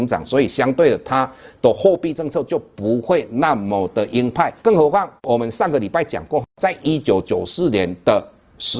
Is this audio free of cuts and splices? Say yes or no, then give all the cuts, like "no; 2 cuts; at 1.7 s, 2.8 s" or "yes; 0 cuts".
no; 2 cuts; at 4.6 s, 5.2 s